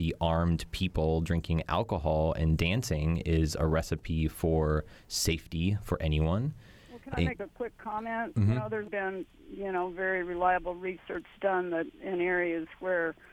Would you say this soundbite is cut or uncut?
cut